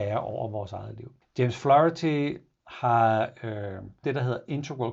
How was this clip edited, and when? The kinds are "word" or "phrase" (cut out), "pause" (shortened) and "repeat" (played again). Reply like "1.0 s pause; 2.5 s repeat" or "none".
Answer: 1.2 s pause; 4.0 s word